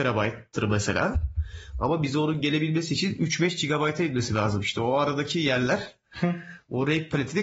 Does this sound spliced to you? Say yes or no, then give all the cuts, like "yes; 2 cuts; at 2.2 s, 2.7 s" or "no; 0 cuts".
no; 0 cuts